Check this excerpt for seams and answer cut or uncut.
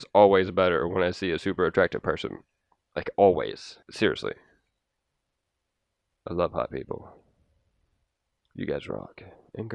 cut